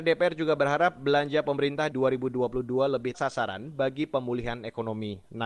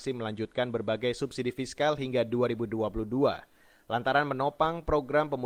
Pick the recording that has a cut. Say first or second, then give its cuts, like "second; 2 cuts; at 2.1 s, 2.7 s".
first; 2 cuts; at 1.9 s, 3.1 s